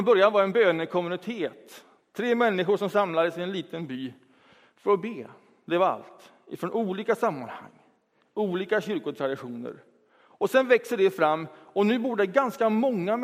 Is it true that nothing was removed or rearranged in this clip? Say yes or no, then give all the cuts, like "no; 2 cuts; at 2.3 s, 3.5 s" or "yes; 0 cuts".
yes; 0 cuts